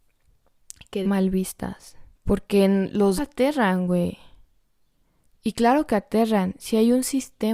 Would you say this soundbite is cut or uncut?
cut